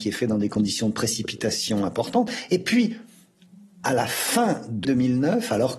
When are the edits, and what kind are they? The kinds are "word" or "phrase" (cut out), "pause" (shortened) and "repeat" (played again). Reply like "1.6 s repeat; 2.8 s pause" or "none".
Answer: 4.8 s word